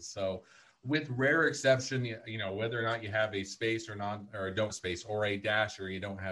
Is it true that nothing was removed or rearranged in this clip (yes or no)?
no